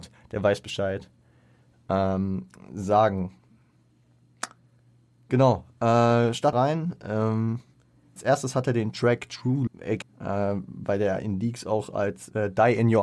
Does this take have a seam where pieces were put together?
yes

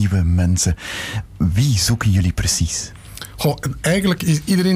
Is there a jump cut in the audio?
no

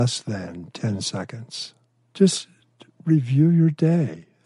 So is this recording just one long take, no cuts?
yes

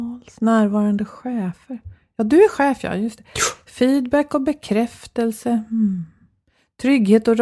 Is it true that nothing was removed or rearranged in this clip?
yes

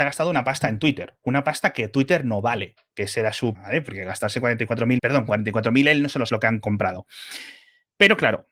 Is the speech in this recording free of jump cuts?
no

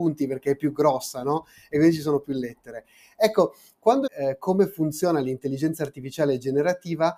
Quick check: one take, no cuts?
no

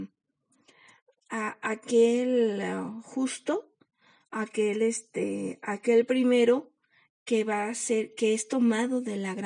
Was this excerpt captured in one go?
yes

